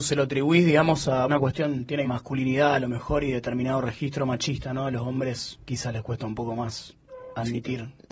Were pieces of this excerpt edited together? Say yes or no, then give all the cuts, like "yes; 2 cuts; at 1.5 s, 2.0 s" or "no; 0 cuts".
yes; 2 cuts; at 1.3 s, 2.0 s